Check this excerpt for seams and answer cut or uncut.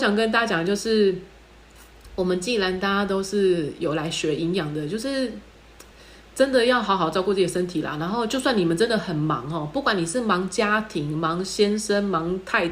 uncut